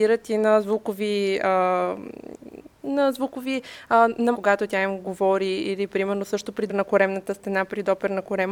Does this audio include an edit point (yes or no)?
yes